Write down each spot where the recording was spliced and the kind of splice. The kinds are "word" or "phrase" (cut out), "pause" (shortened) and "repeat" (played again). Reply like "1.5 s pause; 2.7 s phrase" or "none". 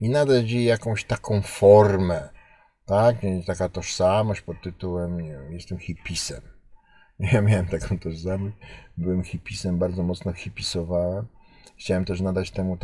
none